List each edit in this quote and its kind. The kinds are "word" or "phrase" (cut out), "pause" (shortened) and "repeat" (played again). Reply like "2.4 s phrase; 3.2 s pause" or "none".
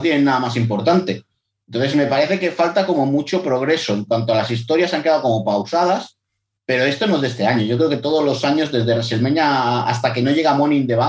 none